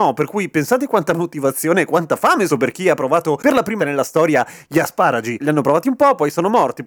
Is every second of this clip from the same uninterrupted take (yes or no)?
no